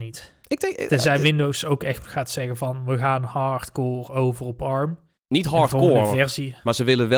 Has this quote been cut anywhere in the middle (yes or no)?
no